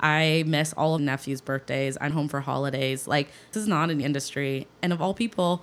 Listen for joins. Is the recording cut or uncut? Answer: cut